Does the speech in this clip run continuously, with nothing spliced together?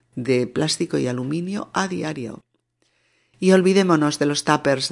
yes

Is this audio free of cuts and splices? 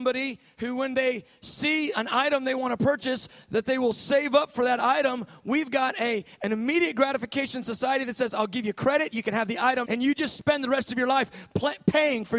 no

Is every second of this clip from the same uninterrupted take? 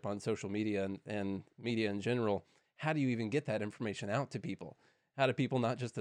yes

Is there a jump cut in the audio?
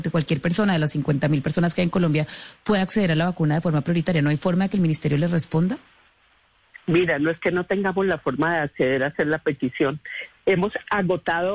no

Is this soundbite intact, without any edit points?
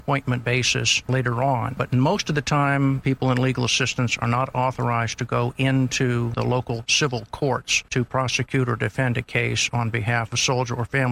yes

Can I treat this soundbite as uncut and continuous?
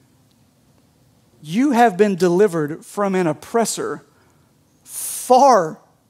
yes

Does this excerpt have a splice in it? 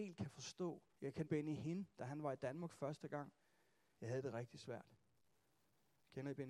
yes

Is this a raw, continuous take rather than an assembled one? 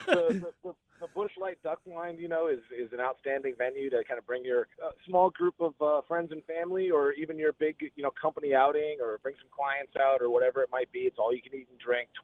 no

